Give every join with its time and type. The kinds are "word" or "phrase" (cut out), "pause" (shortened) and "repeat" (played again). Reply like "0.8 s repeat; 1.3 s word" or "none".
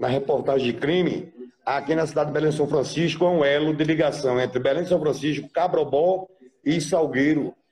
none